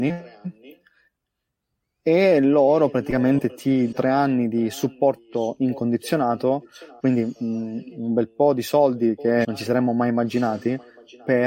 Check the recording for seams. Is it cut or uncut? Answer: cut